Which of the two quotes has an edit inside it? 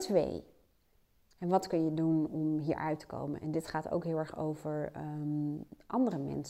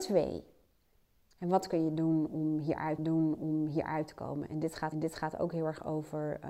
second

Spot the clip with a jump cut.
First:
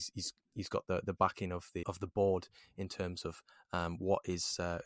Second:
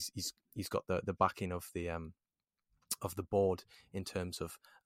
first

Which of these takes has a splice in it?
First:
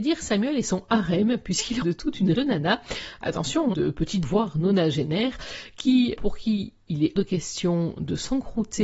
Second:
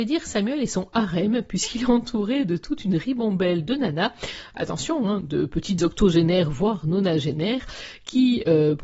first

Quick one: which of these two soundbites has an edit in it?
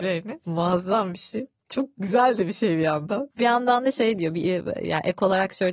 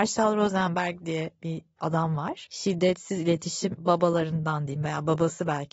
second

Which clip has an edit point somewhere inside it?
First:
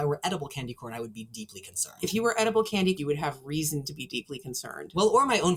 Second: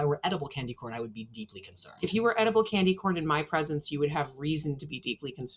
first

